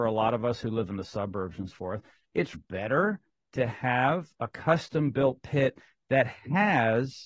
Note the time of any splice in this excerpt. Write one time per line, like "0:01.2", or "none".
0:01.7
0:02.5